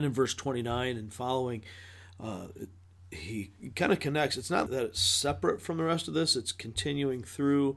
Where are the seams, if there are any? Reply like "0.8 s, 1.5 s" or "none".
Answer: 4.7 s